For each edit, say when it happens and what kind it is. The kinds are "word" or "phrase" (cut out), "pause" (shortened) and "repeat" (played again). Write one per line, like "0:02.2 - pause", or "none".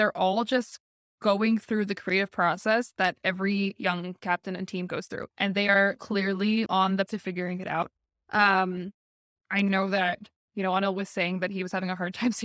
0:05.3 - pause
0:06.0 - word
0:06.7 - word
0:07.1 - word
0:09.4 - phrase